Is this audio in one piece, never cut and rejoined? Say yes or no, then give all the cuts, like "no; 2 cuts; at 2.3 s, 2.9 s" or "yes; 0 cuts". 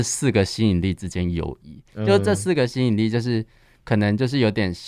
yes; 0 cuts